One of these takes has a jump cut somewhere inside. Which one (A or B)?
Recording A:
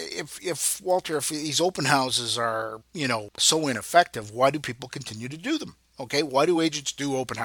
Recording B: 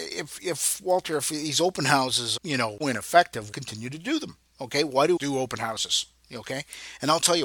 B